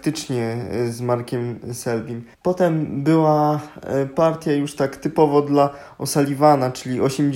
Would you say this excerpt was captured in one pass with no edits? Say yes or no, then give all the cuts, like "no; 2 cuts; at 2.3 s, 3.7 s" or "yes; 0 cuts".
no; 1 cut; at 2.3 s